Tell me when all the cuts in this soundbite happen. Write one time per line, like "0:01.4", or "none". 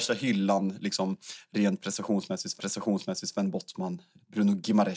0:02.6